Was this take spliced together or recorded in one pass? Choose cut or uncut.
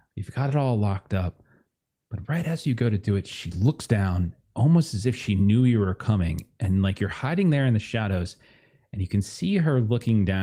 uncut